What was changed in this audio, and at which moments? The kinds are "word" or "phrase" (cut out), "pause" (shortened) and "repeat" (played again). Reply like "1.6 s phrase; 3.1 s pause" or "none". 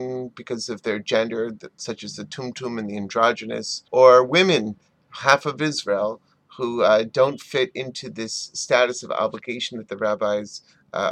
3.9 s pause